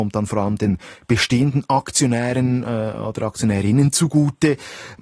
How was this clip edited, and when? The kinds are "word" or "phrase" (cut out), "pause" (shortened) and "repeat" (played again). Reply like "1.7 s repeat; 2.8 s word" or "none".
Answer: none